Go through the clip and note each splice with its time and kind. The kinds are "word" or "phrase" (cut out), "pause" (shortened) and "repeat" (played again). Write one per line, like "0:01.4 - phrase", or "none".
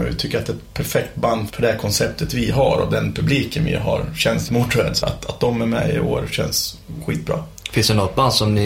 0:01.5 - word
0:04.5 - word
0:05.0 - word